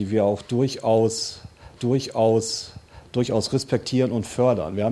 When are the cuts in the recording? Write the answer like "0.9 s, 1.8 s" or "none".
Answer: 1.8 s